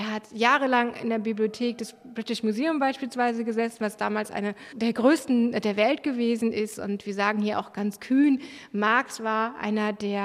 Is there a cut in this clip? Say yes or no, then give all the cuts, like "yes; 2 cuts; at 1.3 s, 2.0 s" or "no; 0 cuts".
no; 0 cuts